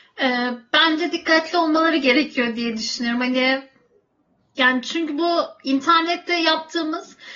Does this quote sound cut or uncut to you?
uncut